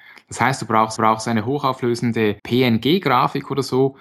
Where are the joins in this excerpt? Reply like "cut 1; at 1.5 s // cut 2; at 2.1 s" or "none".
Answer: cut 1; at 1.0 s // cut 2; at 2.4 s